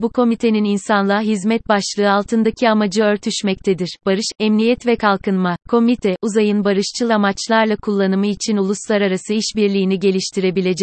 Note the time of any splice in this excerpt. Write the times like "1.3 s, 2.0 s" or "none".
5.6 s